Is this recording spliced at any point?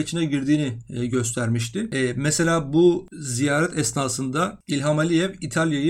no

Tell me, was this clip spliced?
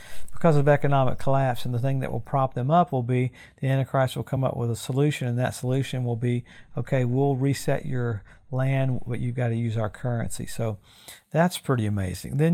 no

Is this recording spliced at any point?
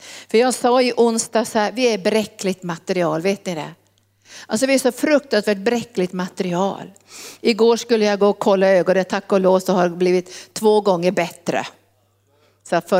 no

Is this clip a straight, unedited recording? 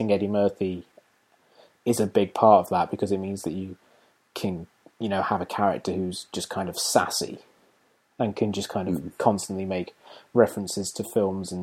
yes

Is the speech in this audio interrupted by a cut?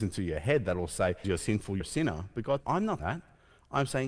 yes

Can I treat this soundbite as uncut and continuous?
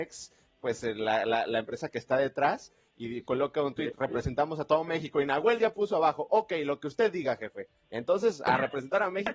yes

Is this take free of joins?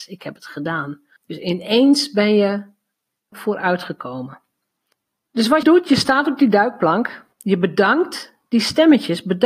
no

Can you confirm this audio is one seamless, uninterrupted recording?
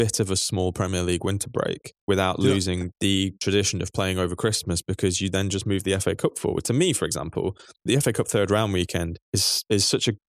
no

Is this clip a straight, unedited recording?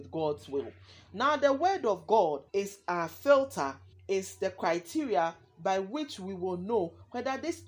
no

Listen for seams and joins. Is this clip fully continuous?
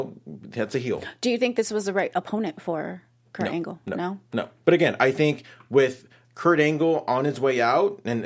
yes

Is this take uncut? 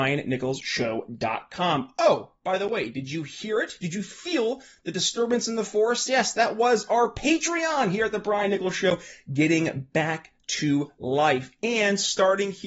yes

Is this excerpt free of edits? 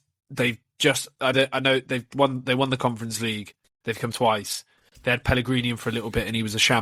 no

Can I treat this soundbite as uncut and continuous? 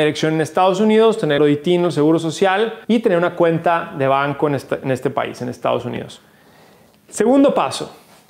no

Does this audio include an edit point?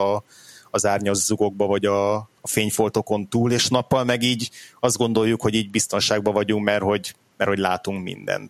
yes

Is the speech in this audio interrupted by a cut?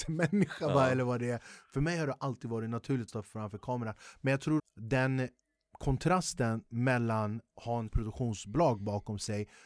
yes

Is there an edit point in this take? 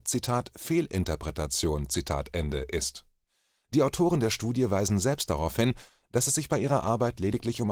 no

